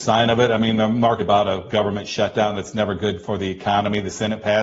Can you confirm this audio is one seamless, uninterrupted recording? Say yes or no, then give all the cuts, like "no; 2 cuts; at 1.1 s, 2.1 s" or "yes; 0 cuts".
no; 1 cut; at 1.2 s